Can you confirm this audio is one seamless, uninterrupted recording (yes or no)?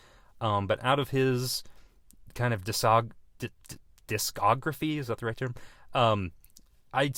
yes